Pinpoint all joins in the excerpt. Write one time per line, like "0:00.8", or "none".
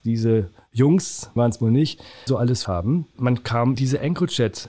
0:01.4
0:02.3
0:02.6
0:03.7